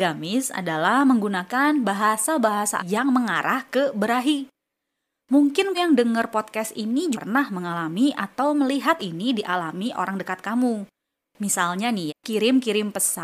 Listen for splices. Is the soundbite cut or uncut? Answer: cut